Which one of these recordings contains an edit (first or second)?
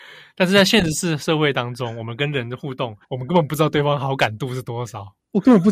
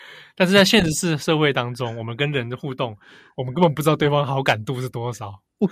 first